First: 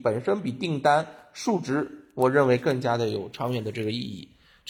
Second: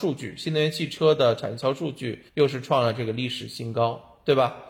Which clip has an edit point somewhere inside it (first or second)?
second